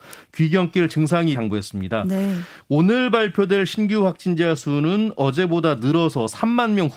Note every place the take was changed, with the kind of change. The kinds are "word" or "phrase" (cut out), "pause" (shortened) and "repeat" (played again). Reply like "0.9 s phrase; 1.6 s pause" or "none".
1.3 s phrase